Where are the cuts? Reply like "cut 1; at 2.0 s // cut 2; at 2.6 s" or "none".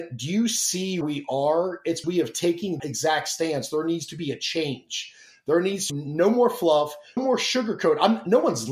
cut 1; at 1.0 s // cut 2; at 2.0 s // cut 3; at 2.8 s // cut 4; at 5.9 s // cut 5; at 7.2 s